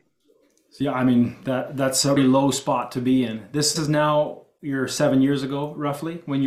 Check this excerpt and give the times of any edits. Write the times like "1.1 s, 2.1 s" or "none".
2.2 s, 3.8 s